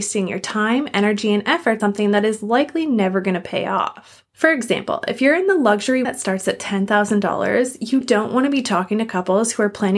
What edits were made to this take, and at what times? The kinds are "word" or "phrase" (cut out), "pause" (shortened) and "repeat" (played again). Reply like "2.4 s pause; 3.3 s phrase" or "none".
1.8 s word; 4.3 s pause; 6.0 s phrase; 8.0 s word

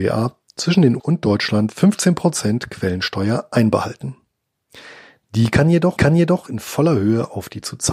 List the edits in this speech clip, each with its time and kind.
1.0 s word; 6.0 s repeat

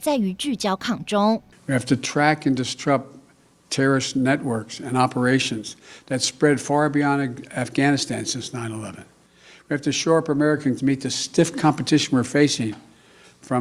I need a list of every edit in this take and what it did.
10.8 s word

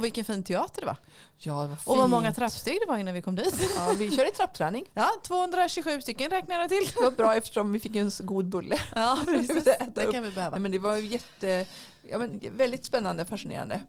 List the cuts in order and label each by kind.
none

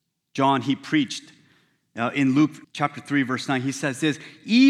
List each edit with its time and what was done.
2.6 s pause

